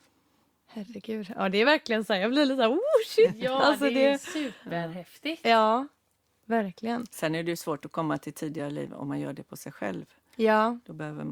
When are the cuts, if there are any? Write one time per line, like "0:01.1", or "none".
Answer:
none